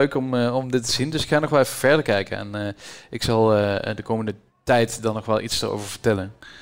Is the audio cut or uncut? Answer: uncut